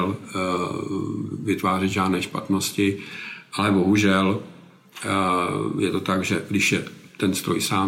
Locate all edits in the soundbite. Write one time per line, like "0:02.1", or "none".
none